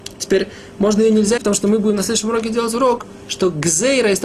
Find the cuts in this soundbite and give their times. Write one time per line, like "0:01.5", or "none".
0:01.4